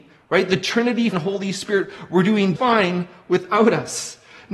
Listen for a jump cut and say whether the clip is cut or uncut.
cut